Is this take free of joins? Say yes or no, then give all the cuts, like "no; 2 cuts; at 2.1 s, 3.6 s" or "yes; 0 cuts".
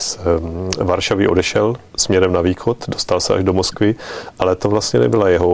yes; 0 cuts